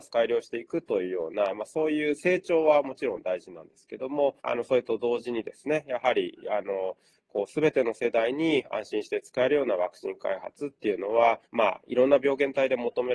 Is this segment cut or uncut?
cut